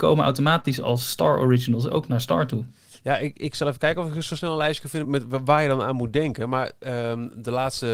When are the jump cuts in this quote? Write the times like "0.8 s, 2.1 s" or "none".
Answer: 5.0 s